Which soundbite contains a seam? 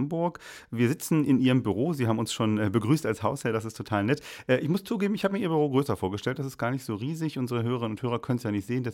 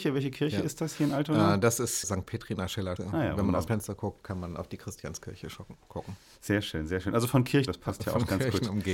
second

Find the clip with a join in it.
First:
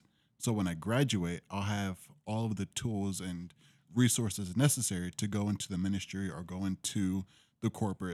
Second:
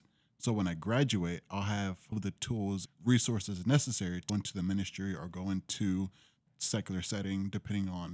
second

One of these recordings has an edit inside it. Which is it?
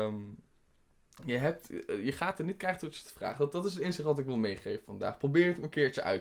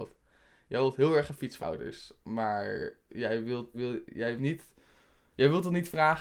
second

